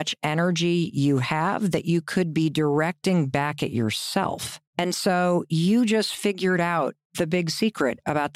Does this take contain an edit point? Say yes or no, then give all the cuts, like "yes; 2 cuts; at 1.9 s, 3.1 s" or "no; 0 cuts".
yes; 1 cut; at 4.7 s